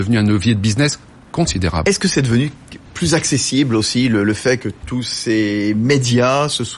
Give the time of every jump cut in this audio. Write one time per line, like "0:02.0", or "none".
none